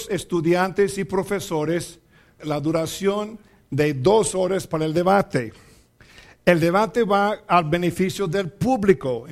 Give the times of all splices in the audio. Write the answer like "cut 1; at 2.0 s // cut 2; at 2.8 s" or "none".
cut 1; at 2.4 s

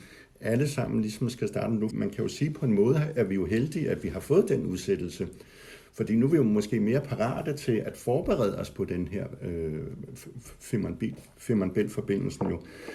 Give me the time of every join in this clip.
cut 1; at 1.9 s // cut 2; at 7.8 s

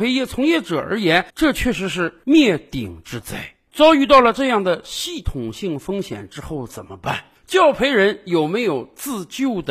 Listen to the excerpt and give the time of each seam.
cut 1; at 1.3 s

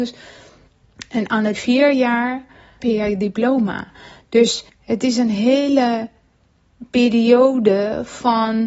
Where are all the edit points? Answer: cut 1; at 1.5 s // cut 2; at 2.8 s // cut 3; at 4.7 s

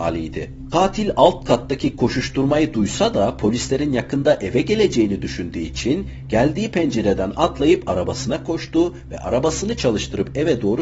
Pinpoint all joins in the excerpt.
none

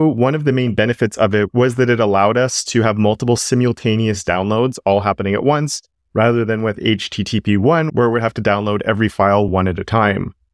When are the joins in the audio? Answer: none

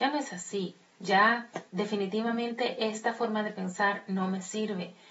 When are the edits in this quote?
cut 1; at 1.7 s

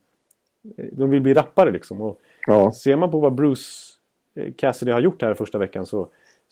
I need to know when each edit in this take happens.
none

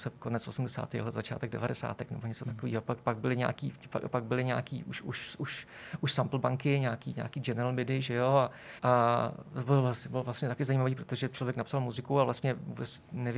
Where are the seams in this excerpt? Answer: cut 1; at 8.8 s

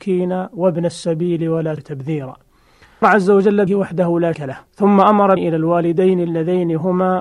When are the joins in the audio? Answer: cut 1; at 1.8 s // cut 2; at 3.0 s // cut 3; at 3.7 s // cut 4; at 4.3 s // cut 5; at 4.7 s // cut 6; at 5.4 s

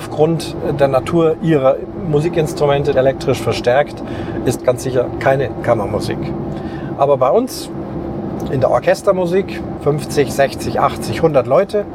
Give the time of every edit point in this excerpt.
cut 1; at 2.9 s // cut 2; at 4.6 s // cut 3; at 9.8 s

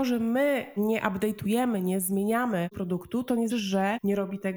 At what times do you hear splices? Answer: cut 1; at 2.7 s // cut 2; at 3.5 s

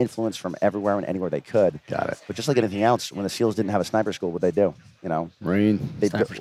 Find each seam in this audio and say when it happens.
none

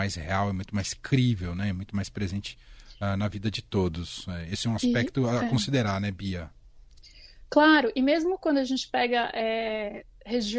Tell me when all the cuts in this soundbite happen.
none

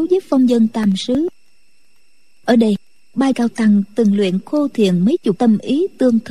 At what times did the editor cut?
cut 1; at 3.3 s // cut 2; at 5.4 s

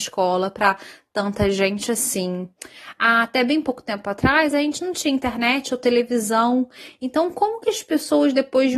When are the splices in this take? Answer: none

